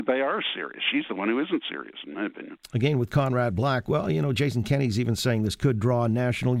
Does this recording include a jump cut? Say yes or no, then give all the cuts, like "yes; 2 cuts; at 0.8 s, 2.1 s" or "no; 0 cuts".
no; 0 cuts